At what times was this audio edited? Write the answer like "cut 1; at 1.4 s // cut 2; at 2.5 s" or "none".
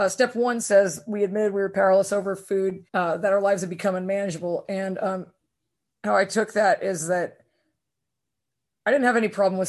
cut 1; at 2.9 s